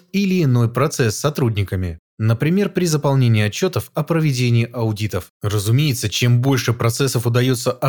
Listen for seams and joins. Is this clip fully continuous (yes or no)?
no